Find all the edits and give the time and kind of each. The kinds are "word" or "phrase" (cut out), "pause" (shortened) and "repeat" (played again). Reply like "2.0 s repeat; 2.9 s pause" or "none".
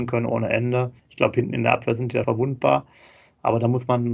1.0 s pause; 2.2 s word

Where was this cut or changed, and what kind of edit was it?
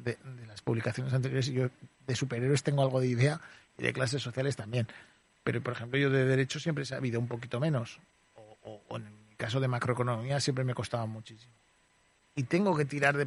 none

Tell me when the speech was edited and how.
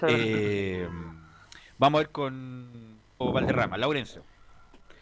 3.2 s word

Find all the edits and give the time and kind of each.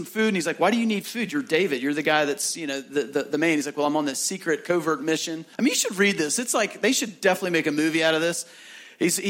5.5 s pause

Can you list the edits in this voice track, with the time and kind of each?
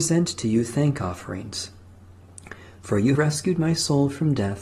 3.2 s word

